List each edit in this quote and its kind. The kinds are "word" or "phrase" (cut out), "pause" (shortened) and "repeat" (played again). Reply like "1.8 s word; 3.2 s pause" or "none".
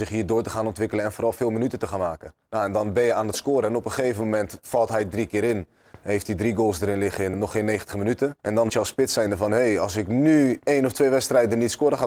2.4 s pause; 7.3 s word; 8.4 s pause; 8.7 s word